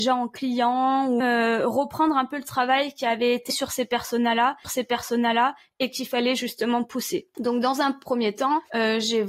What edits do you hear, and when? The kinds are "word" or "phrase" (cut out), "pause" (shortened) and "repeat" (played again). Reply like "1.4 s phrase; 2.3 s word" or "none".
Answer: 1.2 s word; 3.5 s word; 4.6 s repeat